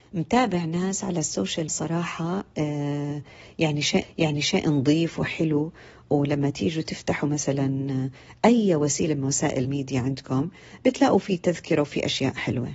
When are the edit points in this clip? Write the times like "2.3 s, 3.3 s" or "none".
1.7 s, 4.0 s, 9.6 s